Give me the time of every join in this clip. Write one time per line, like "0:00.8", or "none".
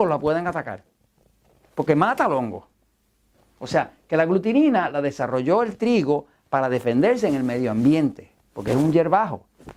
none